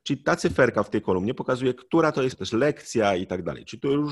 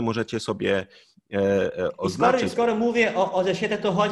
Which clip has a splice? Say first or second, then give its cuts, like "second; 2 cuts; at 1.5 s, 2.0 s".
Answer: first; 1 cut; at 2.3 s